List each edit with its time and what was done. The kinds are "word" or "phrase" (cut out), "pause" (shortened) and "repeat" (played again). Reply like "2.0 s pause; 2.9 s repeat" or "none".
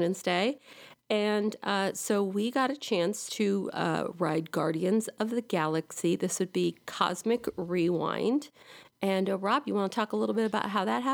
none